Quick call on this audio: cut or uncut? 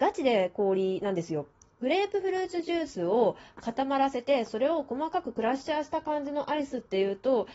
uncut